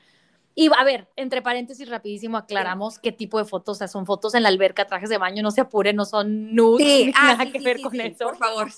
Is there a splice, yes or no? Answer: yes